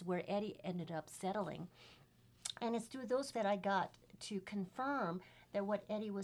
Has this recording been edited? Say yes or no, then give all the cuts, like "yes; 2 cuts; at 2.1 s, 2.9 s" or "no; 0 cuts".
yes; 1 cut; at 3.3 s